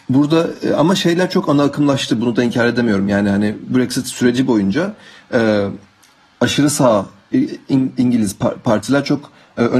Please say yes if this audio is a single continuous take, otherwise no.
yes